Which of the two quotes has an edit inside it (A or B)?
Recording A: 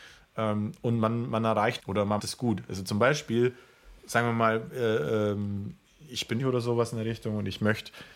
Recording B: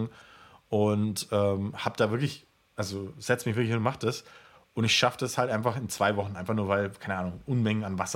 A